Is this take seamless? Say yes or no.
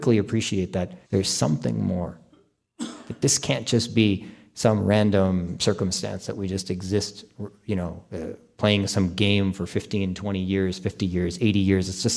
no